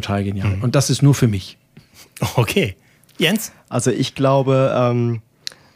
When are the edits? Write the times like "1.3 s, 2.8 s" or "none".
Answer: none